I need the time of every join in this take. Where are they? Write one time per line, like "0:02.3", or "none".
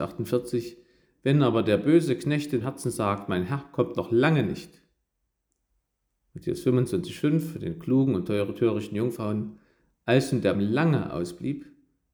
0:02.6
0:10.5